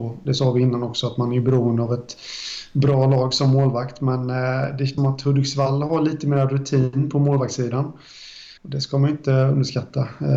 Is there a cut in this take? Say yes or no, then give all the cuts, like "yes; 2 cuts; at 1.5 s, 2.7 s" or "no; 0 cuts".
yes; 2 cuts; at 5.0 s, 8.6 s